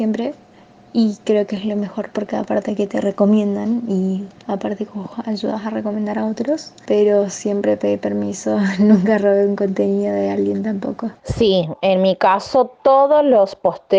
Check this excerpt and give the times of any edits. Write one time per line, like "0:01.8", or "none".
0:11.2